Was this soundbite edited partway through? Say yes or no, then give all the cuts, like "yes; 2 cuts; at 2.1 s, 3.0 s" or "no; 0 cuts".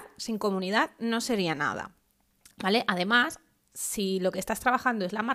no; 0 cuts